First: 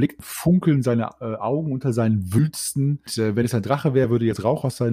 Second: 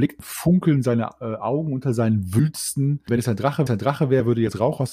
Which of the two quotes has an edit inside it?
second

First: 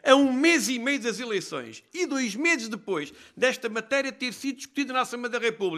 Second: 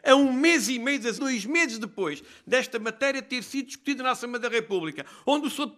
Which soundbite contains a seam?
second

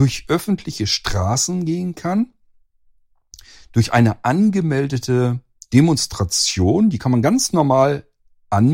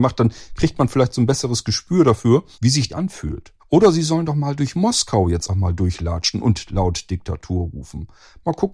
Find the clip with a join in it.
second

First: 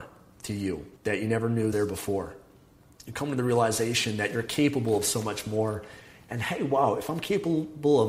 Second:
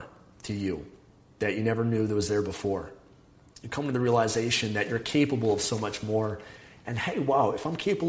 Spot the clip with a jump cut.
first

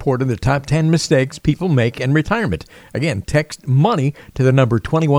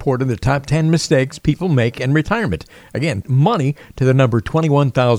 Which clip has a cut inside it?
second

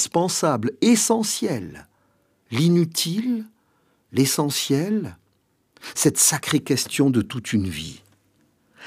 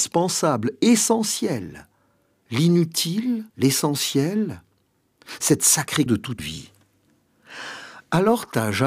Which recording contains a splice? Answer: second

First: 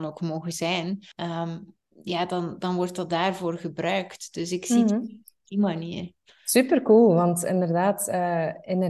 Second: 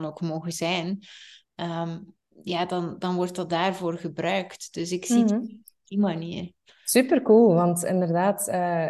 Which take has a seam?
first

